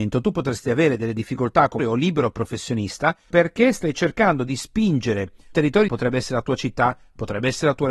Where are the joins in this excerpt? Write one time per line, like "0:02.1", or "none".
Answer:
0:01.8
0:03.3
0:05.5
0:05.9